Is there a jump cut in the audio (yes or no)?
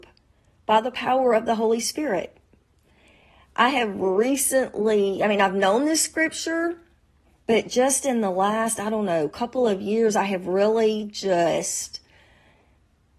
no